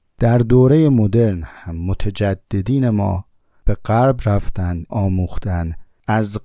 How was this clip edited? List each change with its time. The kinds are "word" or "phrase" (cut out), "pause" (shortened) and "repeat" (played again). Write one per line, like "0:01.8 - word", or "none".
0:04.9 - word